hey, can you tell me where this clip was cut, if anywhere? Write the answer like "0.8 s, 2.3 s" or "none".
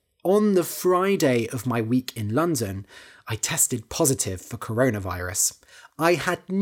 none